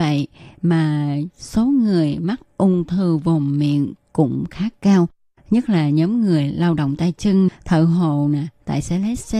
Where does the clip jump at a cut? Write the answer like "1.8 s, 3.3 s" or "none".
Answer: 7.5 s